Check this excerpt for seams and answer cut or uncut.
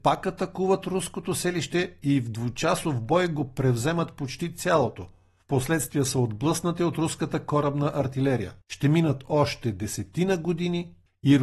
cut